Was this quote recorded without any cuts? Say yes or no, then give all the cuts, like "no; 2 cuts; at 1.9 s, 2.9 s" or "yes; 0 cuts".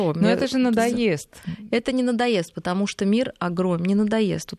yes; 0 cuts